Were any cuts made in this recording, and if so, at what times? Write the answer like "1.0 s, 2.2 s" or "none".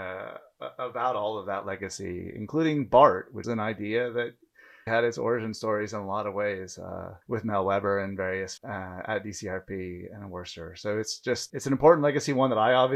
3.4 s, 4.9 s, 7.2 s, 8.6 s, 11.5 s